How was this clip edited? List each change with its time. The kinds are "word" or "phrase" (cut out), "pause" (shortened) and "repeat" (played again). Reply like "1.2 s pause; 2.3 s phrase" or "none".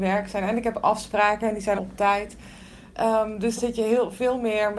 1.8 s word; 3.6 s word